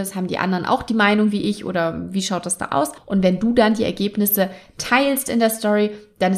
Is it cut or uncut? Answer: uncut